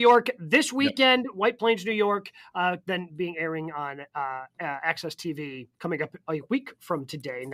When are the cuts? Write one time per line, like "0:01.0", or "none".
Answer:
0:04.5
0:05.7

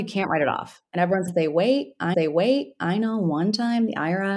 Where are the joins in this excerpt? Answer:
0:01.3
0:02.1

